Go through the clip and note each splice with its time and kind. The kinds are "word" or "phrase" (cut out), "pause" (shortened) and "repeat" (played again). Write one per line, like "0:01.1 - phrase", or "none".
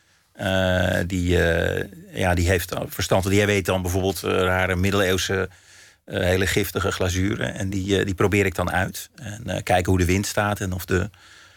none